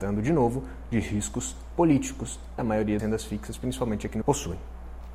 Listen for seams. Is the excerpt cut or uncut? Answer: cut